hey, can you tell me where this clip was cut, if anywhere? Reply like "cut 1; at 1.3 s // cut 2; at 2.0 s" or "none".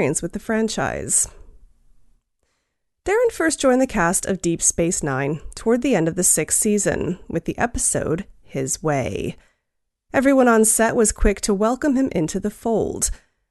none